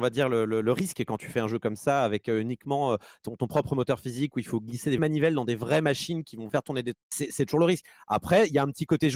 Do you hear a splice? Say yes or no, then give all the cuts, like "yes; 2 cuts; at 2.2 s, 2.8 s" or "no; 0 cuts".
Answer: yes; 3 cuts; at 5.0 s, 6.5 s, 6.9 s